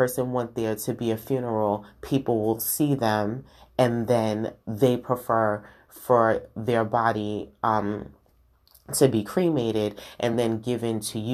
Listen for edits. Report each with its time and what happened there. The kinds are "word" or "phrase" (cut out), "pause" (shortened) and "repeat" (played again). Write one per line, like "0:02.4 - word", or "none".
none